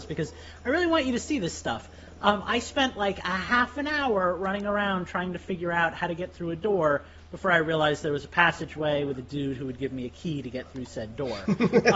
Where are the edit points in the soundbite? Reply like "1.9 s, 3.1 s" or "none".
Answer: none